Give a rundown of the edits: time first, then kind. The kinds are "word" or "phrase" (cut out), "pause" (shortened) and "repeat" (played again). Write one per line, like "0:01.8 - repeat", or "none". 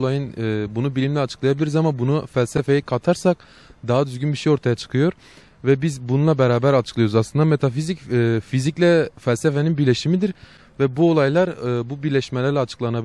none